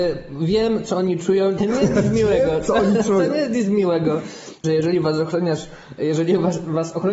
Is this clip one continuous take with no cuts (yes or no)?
no